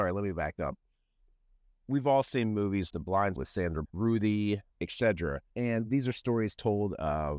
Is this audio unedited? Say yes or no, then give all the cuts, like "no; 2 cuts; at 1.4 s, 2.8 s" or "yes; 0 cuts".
no; 4 cuts; at 2.9 s, 3.4 s, 3.8 s, 5.5 s